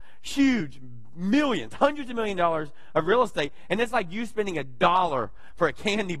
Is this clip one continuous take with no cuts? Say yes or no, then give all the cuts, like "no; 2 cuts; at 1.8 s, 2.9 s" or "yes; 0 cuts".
yes; 0 cuts